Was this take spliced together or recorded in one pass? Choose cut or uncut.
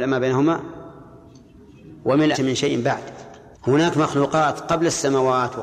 cut